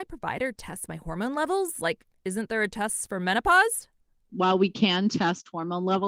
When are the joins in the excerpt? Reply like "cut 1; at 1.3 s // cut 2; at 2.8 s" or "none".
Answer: none